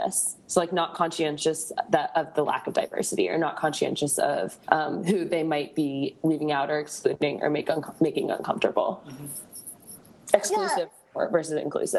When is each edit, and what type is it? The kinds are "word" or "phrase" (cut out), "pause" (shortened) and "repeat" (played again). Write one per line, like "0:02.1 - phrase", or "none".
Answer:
0:04.6 - pause